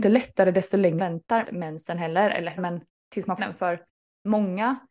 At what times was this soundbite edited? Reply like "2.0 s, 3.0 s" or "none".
1.0 s, 1.4 s, 2.6 s, 3.4 s